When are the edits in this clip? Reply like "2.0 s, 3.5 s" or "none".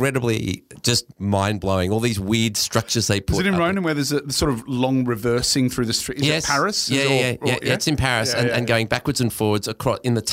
none